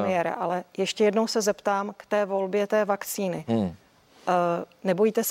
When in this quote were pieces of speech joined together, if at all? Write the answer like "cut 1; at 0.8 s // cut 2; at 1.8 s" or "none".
none